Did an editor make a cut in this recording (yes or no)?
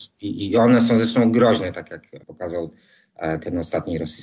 yes